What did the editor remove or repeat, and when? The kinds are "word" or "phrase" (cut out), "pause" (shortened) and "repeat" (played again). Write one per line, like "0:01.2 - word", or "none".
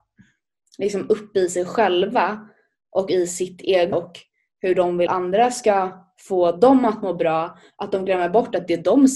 0:03.9 - word
0:05.1 - word